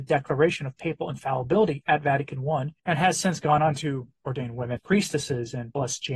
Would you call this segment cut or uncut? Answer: cut